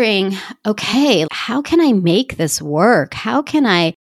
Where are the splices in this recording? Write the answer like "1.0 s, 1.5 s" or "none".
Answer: 1.3 s